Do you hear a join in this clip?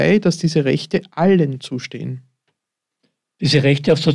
yes; 1 cut; at 1.5 s

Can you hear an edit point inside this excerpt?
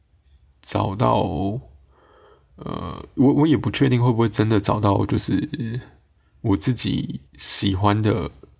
yes; 1 cut; at 7.3 s

